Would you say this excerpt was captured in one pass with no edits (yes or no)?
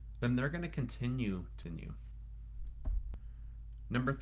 no